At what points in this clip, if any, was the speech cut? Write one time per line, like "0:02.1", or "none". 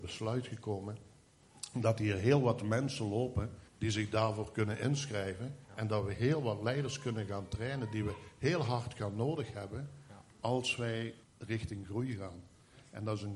0:03.7
0:05.6
0:11.2